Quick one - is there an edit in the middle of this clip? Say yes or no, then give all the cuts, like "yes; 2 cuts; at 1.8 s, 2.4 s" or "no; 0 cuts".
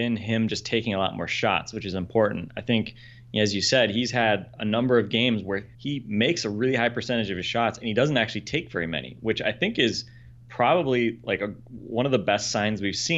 yes; 1 cut; at 5.7 s